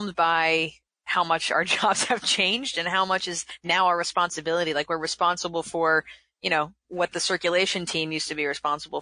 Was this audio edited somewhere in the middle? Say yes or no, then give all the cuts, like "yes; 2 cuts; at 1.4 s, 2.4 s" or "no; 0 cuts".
no; 0 cuts